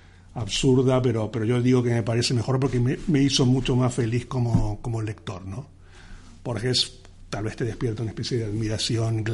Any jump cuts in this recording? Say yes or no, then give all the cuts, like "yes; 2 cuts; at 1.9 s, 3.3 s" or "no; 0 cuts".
no; 0 cuts